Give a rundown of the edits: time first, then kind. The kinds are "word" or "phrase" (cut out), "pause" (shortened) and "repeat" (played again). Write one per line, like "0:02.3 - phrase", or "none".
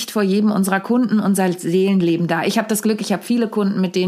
none